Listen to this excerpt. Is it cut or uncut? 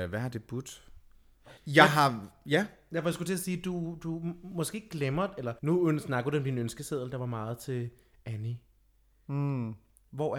cut